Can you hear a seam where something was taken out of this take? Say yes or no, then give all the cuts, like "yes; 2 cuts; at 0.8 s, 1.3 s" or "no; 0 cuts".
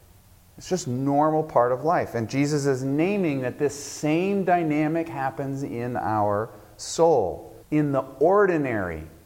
yes; 1 cut; at 7.6 s